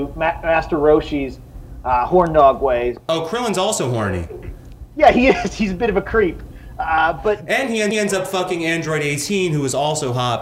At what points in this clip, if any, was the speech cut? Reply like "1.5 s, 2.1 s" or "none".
7.9 s